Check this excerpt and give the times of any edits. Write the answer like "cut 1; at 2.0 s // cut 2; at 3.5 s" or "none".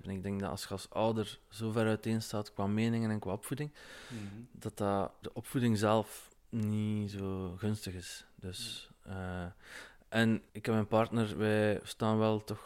cut 1; at 5.2 s // cut 2; at 6.4 s // cut 3; at 10.5 s